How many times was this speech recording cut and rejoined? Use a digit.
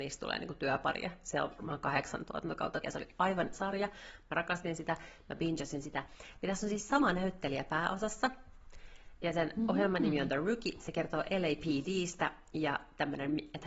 2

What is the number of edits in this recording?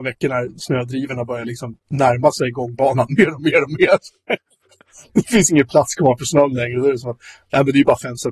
1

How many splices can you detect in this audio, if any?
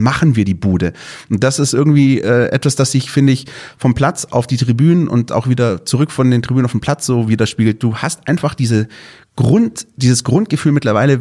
0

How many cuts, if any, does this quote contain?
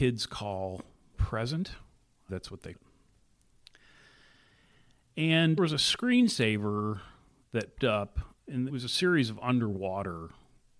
6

